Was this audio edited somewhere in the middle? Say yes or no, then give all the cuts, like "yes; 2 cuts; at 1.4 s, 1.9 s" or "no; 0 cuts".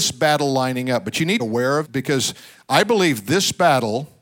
yes; 2 cuts; at 1.4 s, 1.8 s